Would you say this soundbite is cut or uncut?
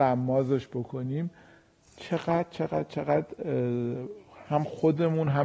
uncut